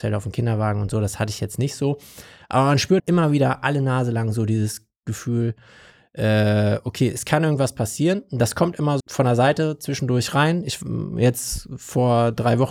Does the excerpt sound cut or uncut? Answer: cut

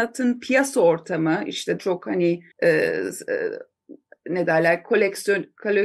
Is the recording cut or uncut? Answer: cut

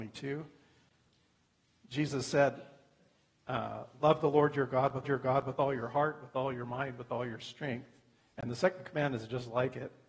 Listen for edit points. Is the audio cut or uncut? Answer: cut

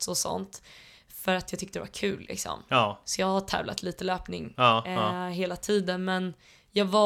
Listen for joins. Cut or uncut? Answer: uncut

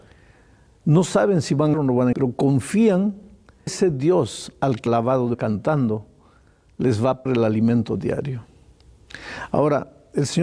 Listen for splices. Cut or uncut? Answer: cut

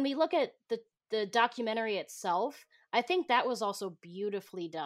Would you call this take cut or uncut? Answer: cut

